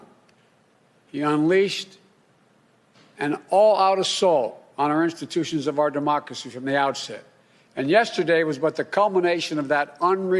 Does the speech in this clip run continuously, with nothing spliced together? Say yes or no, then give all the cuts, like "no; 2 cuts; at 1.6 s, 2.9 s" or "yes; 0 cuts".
yes; 0 cuts